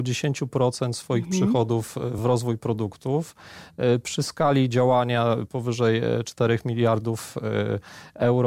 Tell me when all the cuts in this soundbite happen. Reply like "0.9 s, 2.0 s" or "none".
none